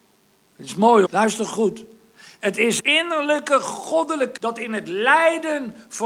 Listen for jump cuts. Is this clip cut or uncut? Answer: cut